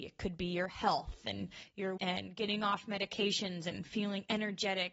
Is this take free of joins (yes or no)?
no